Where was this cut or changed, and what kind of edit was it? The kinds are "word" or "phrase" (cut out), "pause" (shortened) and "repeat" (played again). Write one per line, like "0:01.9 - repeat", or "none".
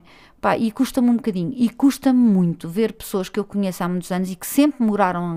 none

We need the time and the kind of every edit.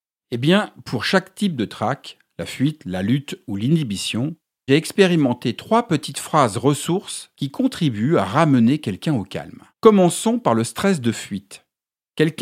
0:04.7 - word
0:07.3 - pause
0:09.7 - pause

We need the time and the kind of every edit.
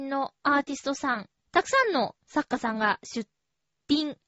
0:01.5 - word

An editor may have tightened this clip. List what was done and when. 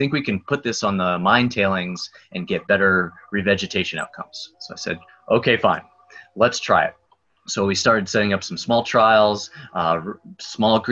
0:04.5 - pause
0:05.1 - pause
0:07.1 - pause

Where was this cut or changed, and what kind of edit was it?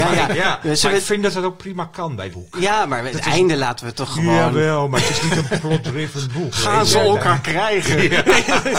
0:02.3 - word
0:03.1 - word

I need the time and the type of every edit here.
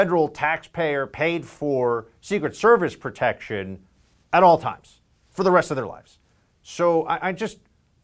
none

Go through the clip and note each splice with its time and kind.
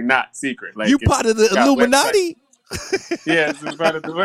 none

